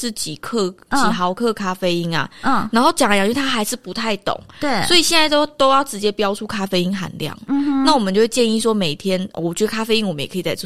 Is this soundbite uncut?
yes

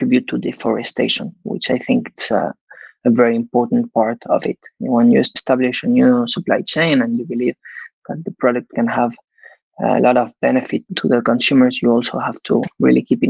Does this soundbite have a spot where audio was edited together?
no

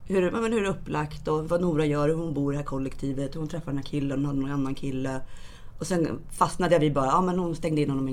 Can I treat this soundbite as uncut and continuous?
yes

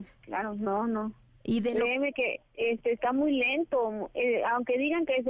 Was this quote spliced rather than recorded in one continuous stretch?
yes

